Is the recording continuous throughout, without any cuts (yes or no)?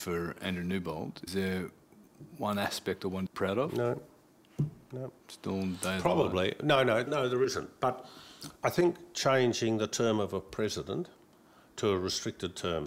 no